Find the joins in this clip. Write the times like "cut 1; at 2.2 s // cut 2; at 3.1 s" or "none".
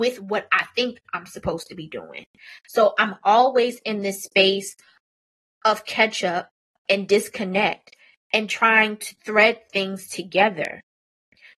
none

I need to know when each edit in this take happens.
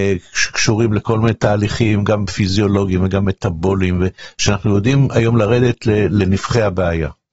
none

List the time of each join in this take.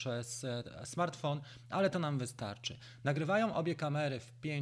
none

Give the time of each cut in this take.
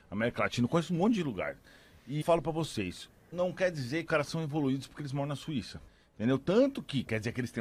cut 1; at 2.2 s // cut 2; at 3.3 s // cut 3; at 4.1 s // cut 4; at 5.9 s

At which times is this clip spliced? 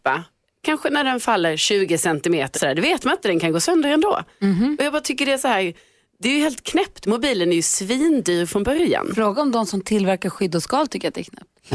cut 1; at 2.5 s

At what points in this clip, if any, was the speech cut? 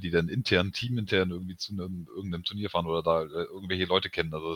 none

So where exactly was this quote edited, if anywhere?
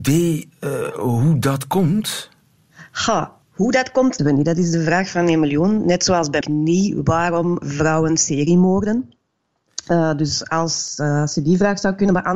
cut 1; at 3.4 s // cut 2; at 4.2 s // cut 3; at 6.4 s // cut 4; at 7.6 s

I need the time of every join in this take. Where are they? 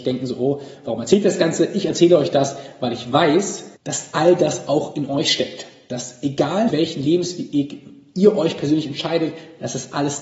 cut 1; at 3.8 s // cut 2; at 6.7 s

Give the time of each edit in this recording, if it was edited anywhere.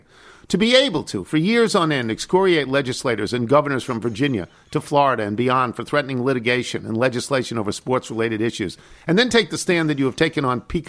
none

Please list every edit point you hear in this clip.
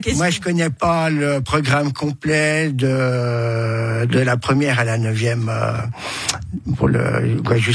none

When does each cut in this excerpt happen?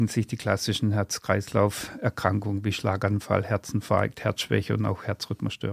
none

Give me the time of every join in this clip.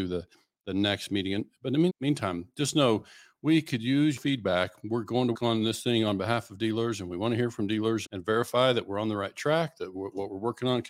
cut 1; at 1.9 s // cut 2; at 4.2 s // cut 3; at 5.3 s // cut 4; at 8.0 s

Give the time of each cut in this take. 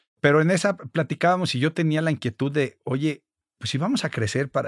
cut 1; at 3.4 s

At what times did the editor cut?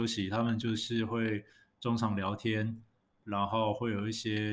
none

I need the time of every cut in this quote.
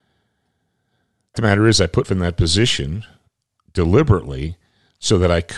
cut 1; at 1.3 s // cut 2; at 2.0 s

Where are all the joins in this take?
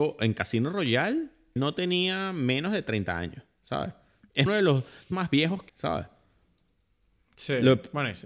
cut 1; at 1.6 s // cut 2; at 4.5 s // cut 3; at 5.1 s // cut 4; at 5.7 s

